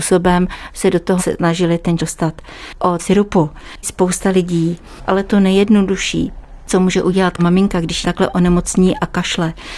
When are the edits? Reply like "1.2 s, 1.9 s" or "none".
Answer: 1.2 s, 2.0 s, 3.0 s, 3.8 s, 7.4 s, 8.0 s